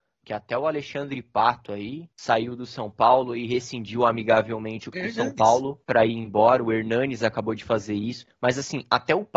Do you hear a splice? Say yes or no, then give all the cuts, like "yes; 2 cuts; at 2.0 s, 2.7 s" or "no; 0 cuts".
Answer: yes; 3 cuts; at 2.1 s, 4.9 s, 5.8 s